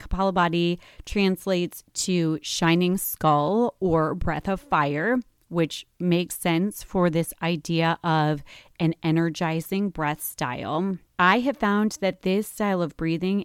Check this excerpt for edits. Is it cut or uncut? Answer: uncut